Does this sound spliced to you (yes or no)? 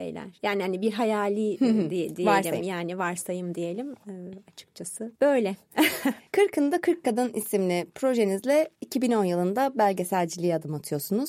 yes